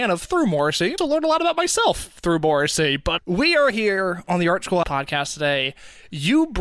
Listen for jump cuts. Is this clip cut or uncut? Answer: cut